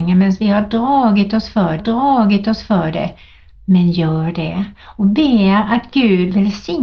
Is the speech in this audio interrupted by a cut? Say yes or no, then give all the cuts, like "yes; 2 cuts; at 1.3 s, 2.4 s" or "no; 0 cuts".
yes; 1 cut; at 1.8 s